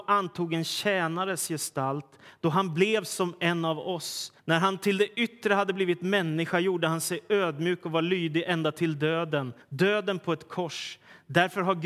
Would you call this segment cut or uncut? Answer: cut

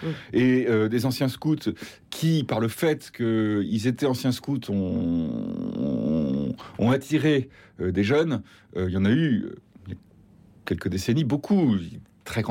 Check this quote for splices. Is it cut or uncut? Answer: uncut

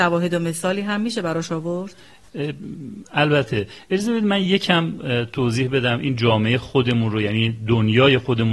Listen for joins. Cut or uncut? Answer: uncut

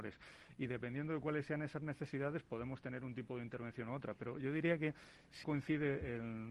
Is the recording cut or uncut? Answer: cut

